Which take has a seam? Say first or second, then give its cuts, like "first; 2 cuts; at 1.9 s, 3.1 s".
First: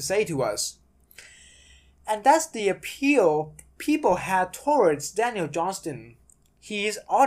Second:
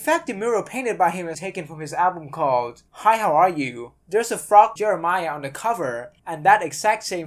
second; 5 cuts; at 1.3 s, 2.9 s, 4.0 s, 4.8 s, 6.2 s